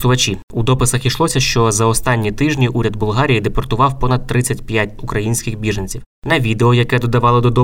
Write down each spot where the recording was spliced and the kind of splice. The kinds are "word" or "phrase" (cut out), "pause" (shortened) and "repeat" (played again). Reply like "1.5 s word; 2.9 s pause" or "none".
5.0 s word; 6.1 s pause